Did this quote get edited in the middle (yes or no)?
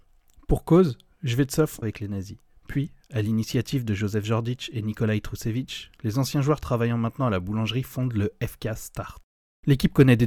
yes